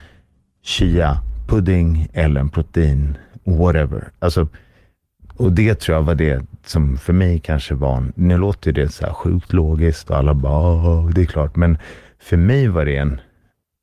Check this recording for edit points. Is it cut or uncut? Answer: uncut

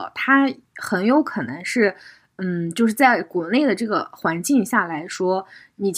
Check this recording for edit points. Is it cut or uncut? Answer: uncut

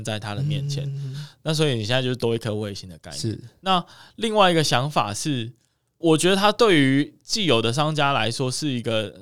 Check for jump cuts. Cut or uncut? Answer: cut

